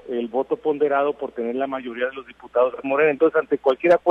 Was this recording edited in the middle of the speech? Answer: yes; 1 cut; at 2.8 s

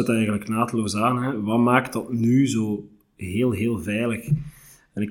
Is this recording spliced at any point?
no; 0 cuts

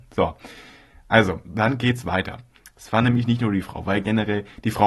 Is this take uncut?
yes; 0 cuts

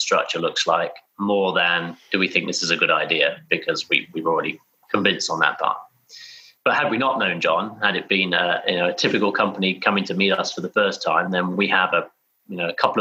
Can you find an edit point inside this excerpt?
no; 0 cuts

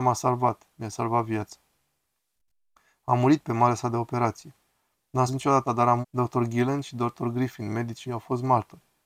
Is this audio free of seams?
no; 4 cuts; at 5.3 s, 5.6 s, 6.0 s, 8.1 s

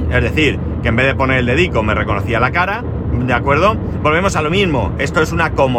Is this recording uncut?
yes; 0 cuts

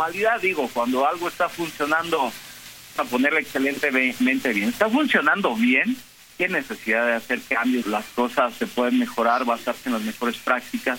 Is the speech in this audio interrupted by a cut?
yes; 2 cuts; at 3.0 s, 7.8 s

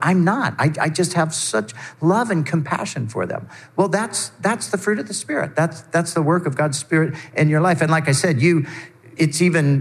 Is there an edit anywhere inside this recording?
no; 0 cuts

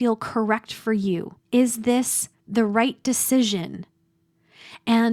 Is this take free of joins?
no; 2 cuts; at 1.5 s, 2.3 s

